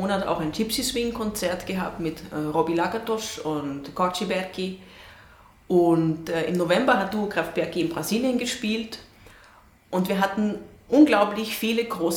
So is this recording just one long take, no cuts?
yes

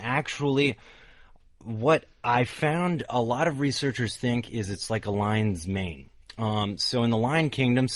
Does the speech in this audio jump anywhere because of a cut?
no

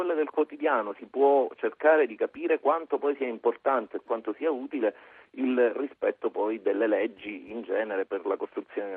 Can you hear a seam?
no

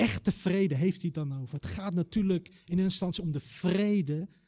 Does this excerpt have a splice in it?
no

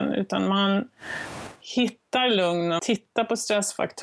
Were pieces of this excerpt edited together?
yes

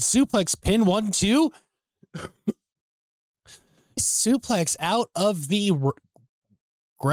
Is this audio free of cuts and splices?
no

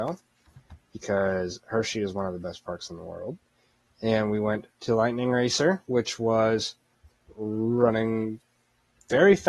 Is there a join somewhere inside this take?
no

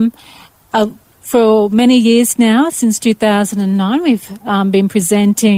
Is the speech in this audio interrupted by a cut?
no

